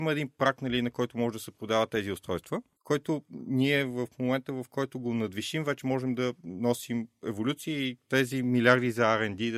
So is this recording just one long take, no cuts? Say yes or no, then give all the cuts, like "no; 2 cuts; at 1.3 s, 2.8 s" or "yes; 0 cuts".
no; 1 cut; at 2.7 s